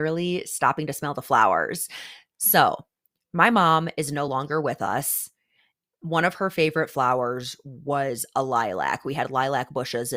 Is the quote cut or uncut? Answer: uncut